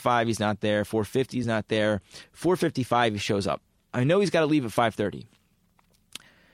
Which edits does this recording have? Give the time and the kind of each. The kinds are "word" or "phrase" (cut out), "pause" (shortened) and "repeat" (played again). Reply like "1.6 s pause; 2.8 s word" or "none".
none

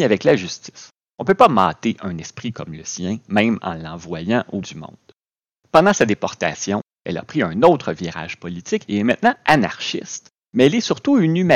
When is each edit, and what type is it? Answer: 4.6 s word

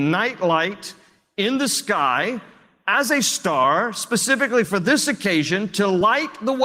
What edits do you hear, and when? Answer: none

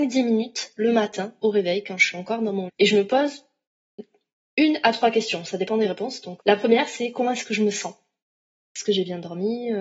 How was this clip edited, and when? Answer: 2.7 s word; 6.4 s word

